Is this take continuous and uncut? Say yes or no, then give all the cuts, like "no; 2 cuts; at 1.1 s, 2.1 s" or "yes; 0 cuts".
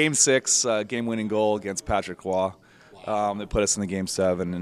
yes; 0 cuts